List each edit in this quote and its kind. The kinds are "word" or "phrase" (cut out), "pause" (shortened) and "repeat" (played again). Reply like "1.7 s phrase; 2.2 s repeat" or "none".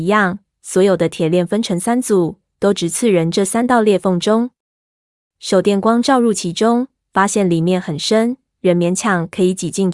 none